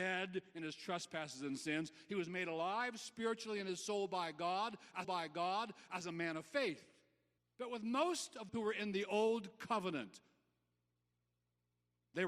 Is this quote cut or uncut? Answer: cut